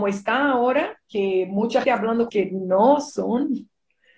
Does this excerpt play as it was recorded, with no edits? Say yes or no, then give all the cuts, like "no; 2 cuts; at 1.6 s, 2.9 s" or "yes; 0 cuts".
no; 2 cuts; at 1.8 s, 2.3 s